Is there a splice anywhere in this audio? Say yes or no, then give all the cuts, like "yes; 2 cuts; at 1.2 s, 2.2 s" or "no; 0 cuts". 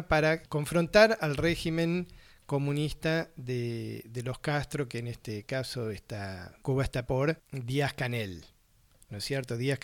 yes; 1 cut; at 7.1 s